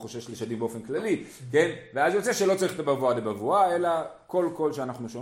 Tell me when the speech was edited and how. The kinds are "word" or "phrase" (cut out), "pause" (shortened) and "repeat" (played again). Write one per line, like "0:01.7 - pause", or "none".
none